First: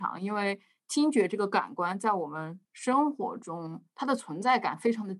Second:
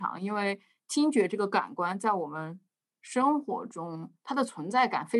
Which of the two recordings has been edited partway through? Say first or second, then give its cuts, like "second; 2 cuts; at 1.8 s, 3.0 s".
first; 1 cut; at 2.6 s